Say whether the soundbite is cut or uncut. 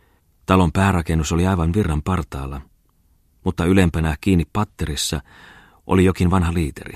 uncut